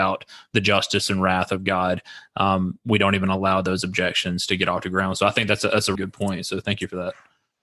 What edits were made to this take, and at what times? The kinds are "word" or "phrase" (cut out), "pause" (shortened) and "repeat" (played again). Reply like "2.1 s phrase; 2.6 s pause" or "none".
6.0 s word

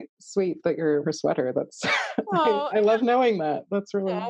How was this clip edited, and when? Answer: 1.0 s word

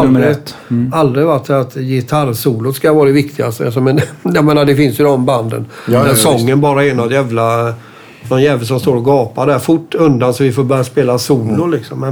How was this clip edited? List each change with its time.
none

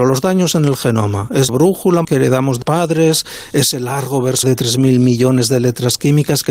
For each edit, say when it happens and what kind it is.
1.5 s word; 2.0 s word; 2.6 s word; 4.4 s word

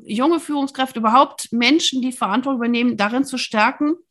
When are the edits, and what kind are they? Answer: none

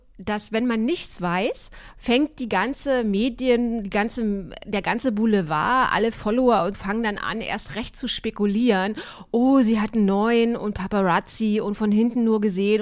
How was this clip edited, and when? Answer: 6.7 s word

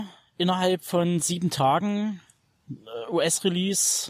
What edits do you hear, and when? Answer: none

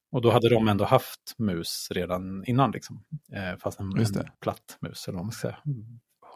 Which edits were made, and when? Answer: 3.2 s pause; 4.3 s pause

